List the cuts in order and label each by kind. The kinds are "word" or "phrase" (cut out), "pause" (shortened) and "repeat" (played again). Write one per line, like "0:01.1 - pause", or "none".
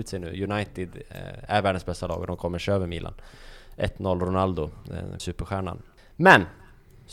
0:05.2 - word